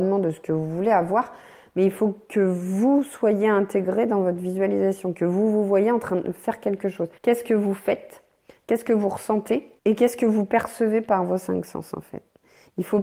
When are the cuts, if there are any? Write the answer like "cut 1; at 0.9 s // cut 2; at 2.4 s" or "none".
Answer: cut 1; at 7.2 s // cut 2; at 9.8 s